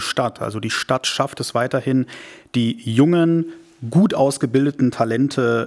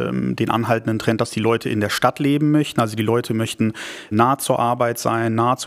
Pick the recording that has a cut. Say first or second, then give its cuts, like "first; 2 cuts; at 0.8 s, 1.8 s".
second; 1 cut; at 4.1 s